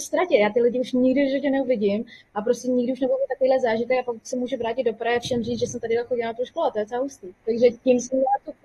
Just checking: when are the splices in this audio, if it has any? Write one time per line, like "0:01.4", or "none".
0:07.4